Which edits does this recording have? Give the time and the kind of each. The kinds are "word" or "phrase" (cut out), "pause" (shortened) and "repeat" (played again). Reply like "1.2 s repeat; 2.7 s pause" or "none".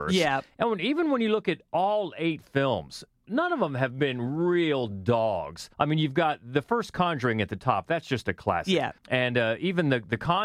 5.7 s pause; 9.0 s pause